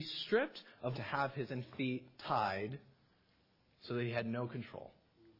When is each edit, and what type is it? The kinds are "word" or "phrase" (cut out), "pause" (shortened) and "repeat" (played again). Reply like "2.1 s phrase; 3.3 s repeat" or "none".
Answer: 0.9 s phrase; 1.5 s word; 2.1 s pause

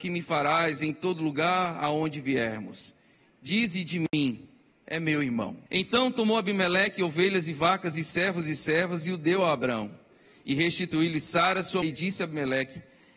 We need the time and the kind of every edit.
5.7 s pause; 11.8 s word

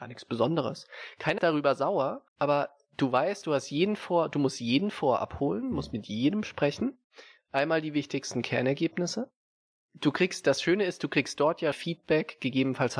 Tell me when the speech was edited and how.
1.4 s word; 2.3 s pause; 11.7 s word

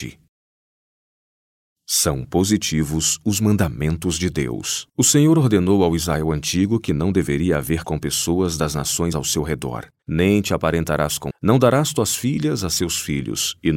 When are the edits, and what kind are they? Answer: 4.9 s pause; 7.8 s word; 9.1 s word; 10.0 s pause; 11.3 s word

